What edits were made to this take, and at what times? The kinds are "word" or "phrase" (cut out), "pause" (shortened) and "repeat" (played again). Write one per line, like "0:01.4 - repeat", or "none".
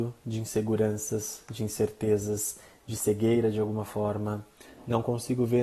none